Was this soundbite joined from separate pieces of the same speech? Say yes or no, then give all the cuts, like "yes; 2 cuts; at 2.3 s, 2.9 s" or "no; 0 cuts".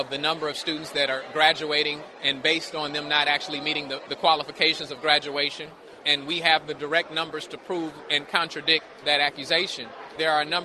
no; 0 cuts